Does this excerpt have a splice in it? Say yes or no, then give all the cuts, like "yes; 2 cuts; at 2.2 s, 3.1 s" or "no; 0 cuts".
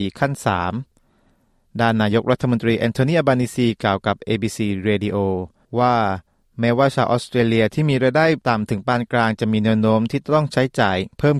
no; 0 cuts